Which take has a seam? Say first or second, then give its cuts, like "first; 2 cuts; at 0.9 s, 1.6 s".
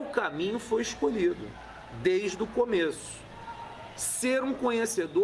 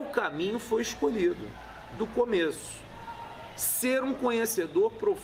second; 1 cut; at 2.0 s